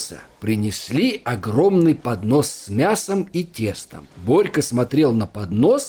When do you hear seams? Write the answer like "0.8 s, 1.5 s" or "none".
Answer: 4.1 s